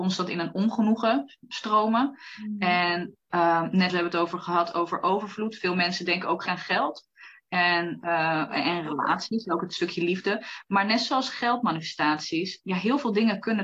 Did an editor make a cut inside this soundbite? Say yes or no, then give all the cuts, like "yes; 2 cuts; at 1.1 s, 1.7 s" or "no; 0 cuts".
yes; 4 cuts; at 3.2 s, 3.9 s, 6.5 s, 12.6 s